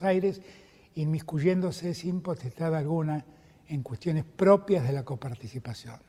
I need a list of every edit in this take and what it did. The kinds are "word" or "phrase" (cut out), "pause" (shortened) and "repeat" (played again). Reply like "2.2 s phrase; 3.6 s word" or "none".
none